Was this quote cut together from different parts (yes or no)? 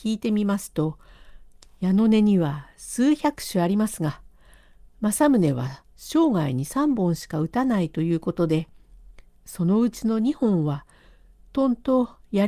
no